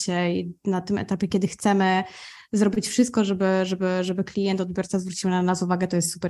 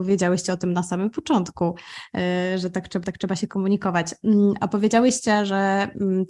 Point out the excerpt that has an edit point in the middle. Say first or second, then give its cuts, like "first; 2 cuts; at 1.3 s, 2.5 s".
second; 1 cut; at 3.0 s